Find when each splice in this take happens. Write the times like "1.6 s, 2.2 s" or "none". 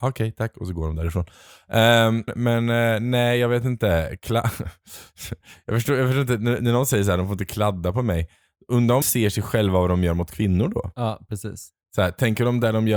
2.3 s, 9.0 s